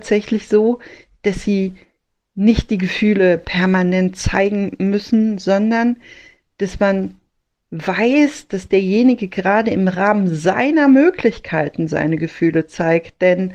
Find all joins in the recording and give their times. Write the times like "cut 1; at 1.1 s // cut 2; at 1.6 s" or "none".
none